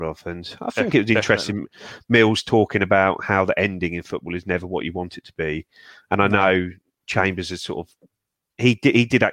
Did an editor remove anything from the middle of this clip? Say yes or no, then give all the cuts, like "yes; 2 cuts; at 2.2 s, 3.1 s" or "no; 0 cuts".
no; 0 cuts